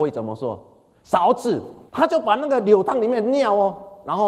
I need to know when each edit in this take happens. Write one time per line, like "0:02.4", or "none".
0:01.9